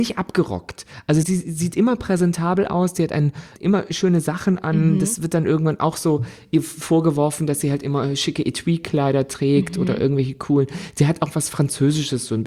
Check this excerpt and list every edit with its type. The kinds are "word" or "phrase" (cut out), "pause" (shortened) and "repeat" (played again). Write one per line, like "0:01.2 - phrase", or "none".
0:01.2 - word
0:03.6 - word

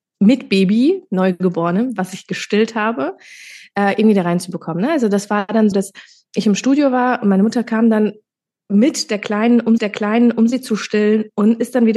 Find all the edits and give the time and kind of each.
0:05.7 - word
0:08.3 - pause
0:09.8 - repeat

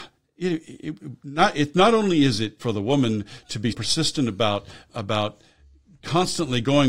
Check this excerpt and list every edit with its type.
0:02.6 - word
0:03.7 - word
0:04.9 - word

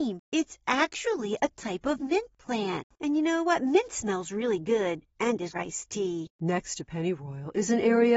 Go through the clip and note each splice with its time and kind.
0:05.5 - phrase

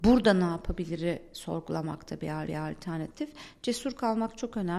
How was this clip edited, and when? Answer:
0:02.5 - repeat

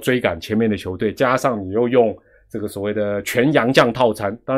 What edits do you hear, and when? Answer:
none

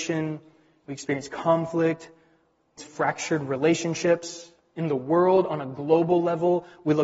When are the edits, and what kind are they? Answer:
0:02.8 - word

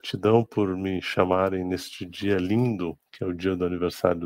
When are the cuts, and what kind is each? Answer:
none

